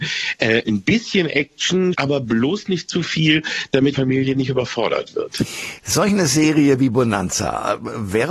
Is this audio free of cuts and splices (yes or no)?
no